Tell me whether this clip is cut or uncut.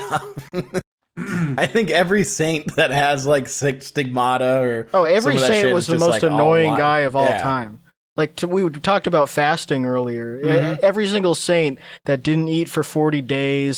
uncut